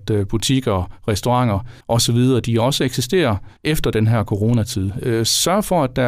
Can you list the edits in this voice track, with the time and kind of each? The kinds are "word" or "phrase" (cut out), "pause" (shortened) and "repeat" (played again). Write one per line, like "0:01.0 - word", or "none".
0:01.8 - pause
0:03.6 - pause